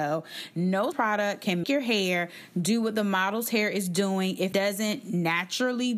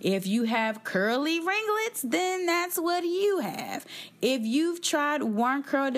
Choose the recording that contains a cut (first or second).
first